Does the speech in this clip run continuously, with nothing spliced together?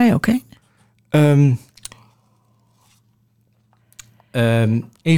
yes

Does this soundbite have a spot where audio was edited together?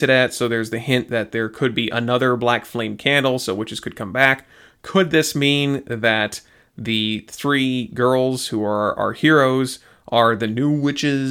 no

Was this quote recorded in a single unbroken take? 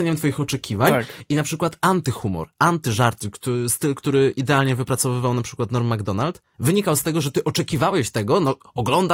yes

